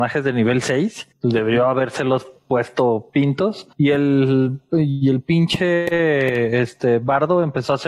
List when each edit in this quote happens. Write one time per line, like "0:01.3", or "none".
0:01.1
0:03.7